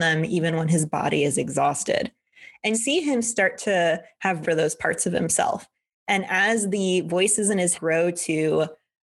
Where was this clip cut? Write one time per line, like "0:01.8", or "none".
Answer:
0:02.7
0:04.4
0:07.7